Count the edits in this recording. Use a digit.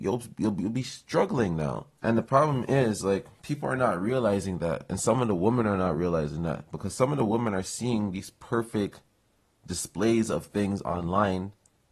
1